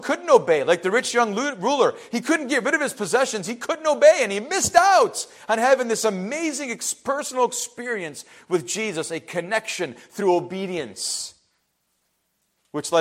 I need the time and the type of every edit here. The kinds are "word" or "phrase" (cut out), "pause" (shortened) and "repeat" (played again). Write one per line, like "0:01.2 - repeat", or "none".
none

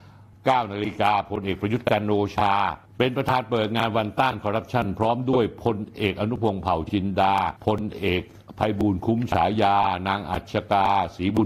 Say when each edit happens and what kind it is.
0:02.9 - pause
0:07.6 - pause

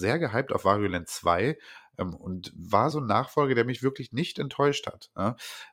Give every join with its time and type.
0:02.9 - phrase

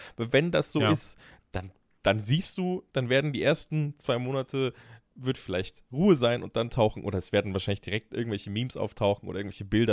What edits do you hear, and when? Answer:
0:01.4 - word

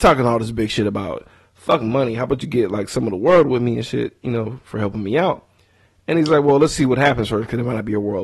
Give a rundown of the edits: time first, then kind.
none

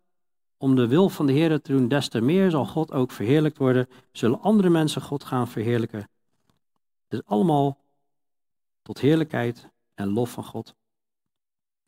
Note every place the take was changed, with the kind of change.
none

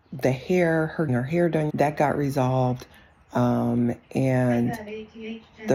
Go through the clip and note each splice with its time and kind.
0:01.1 - word
0:01.7 - word

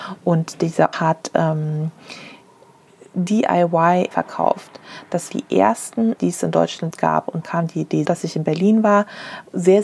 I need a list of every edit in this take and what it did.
0:00.9 - word
0:04.1 - word
0:05.3 - word
0:06.2 - word
0:06.9 - word
0:07.4 - word
0:08.1 - word

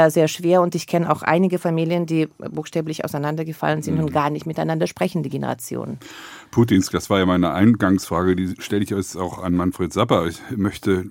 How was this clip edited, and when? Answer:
0:06.9 - word

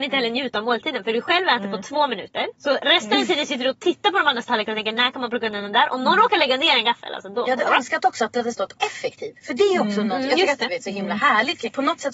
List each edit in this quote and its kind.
0:10.7 - word

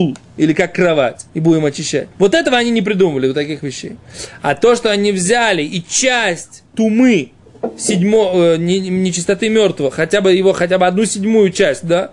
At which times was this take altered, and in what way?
0:01.3 - pause
0:02.1 - pause
0:06.7 - pause

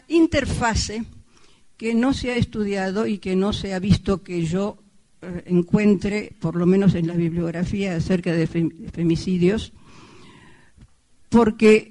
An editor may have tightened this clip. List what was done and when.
none

